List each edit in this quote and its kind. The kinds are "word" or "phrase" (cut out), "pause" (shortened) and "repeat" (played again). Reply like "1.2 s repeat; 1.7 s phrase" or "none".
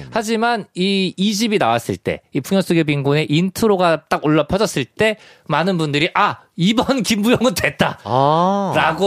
none